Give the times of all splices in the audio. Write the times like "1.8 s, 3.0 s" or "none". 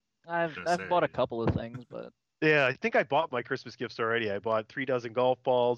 3.3 s